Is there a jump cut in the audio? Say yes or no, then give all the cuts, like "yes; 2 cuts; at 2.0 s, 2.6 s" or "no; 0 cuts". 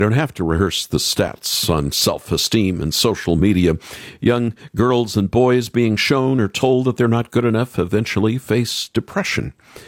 no; 0 cuts